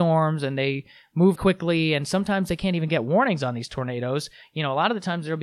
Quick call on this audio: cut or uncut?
cut